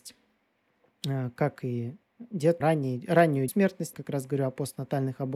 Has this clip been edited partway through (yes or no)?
yes